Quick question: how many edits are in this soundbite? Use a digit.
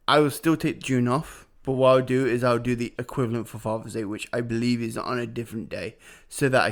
2